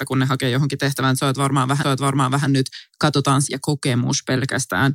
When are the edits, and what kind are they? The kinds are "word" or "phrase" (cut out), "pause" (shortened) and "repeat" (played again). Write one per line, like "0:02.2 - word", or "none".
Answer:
0:01.8 - repeat
0:03.5 - word

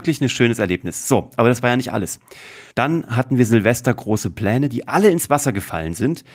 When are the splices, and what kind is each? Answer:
0:02.7 - pause

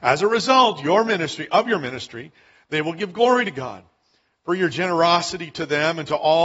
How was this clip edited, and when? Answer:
none

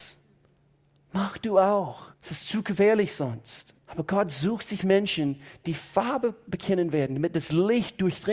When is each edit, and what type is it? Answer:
0:02.1 - pause
0:03.8 - pause

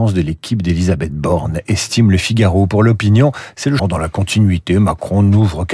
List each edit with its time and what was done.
0:03.8 - word

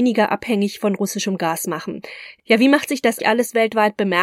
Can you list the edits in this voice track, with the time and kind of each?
0:03.2 - word

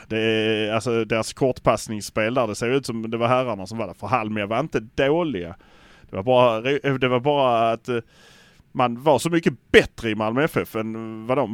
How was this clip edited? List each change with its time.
none

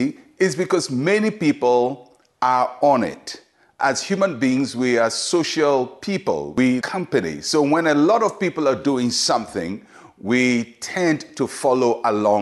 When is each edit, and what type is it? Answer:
0:06.8 - word

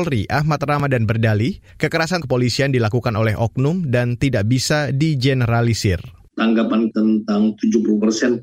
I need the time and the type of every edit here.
0:02.2 - phrase
0:06.9 - word

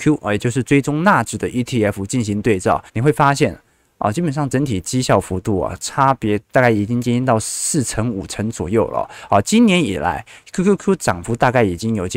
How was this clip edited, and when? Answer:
0:02.9 - pause

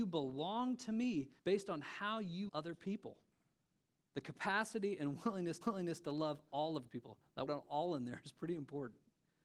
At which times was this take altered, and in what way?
0:01.4 - pause
0:02.5 - word
0:03.7 - pause
0:05.6 - repeat
0:06.9 - word
0:07.5 - word

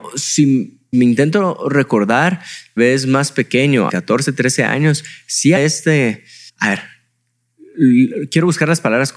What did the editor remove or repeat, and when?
0:00.9 - word
0:02.8 - word
0:03.9 - word
0:05.6 - word
0:06.5 - pause

